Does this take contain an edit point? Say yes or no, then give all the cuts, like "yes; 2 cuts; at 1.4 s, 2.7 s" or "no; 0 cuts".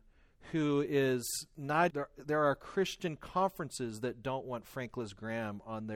yes; 1 cut; at 1.9 s